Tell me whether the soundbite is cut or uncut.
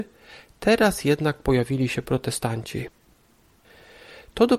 uncut